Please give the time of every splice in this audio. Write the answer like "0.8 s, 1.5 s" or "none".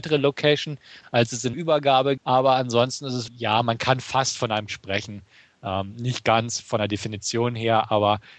1.5 s, 2.2 s, 3.3 s, 4.7 s